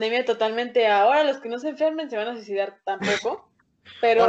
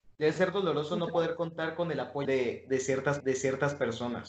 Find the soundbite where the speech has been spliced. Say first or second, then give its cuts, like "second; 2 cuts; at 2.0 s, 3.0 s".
second; 2 cuts; at 2.3 s, 3.2 s